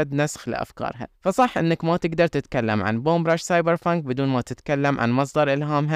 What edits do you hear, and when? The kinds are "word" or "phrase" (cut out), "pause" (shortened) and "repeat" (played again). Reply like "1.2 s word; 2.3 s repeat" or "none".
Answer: 1.1 s pause

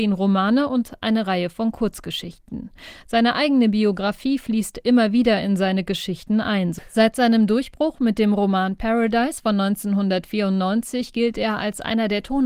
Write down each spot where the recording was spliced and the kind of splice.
none

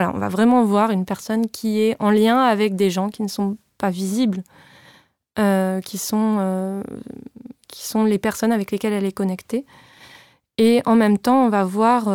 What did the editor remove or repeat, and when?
none

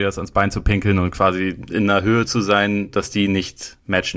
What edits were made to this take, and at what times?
none

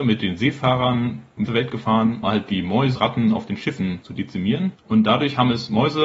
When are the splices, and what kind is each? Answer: 1.5 s word; 2.2 s word; 3.0 s word

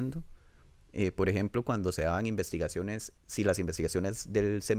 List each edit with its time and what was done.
3.2 s pause

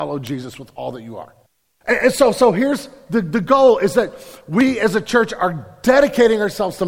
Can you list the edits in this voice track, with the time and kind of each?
1.5 s pause

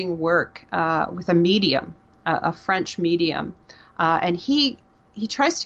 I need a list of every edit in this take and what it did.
none

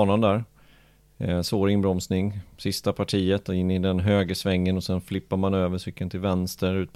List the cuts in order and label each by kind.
none

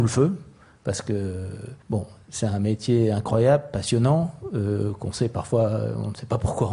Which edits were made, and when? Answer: 1.8 s pause

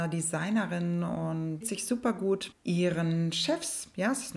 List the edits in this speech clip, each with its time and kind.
1.6 s word; 2.5 s word

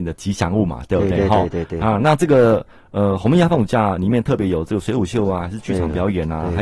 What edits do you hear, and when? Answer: none

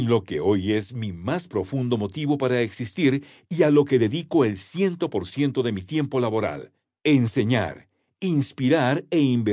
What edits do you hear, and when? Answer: none

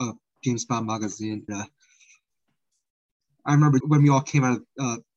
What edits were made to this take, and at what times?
1.5 s word; 3.8 s phrase

